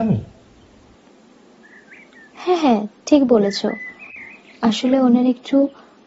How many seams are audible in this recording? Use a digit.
0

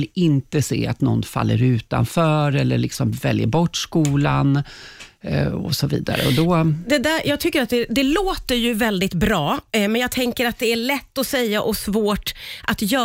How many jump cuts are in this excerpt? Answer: 0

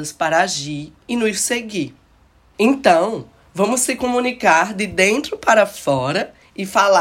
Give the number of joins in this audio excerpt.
0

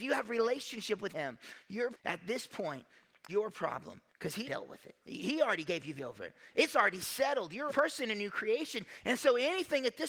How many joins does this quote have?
8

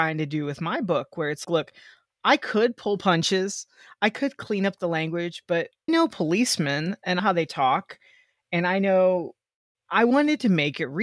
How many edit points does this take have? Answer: 4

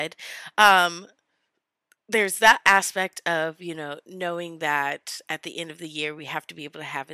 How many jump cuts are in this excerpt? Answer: 0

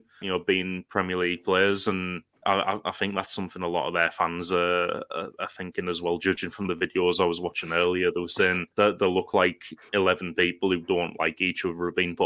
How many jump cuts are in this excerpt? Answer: 2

